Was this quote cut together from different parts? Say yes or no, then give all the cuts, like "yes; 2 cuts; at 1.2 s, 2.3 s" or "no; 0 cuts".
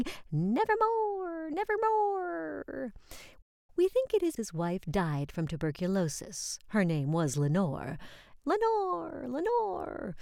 yes; 1 cut; at 4.4 s